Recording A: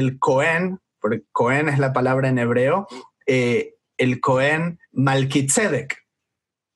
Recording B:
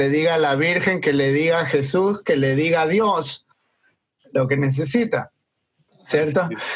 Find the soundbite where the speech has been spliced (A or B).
A